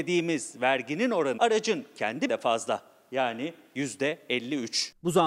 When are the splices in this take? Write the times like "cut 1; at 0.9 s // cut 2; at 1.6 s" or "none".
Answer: cut 1; at 1.4 s // cut 2; at 2.3 s